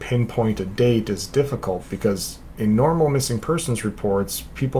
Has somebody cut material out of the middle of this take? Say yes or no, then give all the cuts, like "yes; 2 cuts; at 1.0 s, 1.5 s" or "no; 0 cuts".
no; 0 cuts